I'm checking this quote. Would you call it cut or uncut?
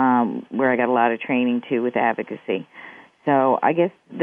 uncut